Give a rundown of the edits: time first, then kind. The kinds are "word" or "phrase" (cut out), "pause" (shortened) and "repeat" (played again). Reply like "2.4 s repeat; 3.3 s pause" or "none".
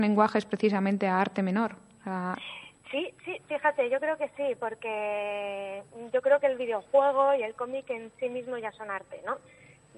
none